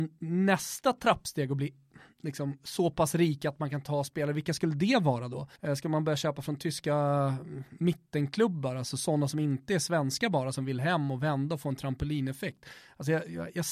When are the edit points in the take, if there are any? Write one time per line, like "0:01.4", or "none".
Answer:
0:05.6